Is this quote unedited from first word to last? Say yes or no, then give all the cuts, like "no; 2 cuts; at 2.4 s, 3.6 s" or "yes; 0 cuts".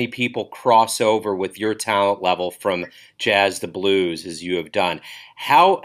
yes; 0 cuts